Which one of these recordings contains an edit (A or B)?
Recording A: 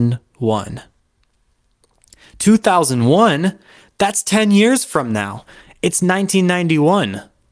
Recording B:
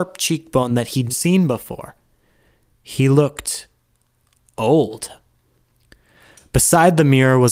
B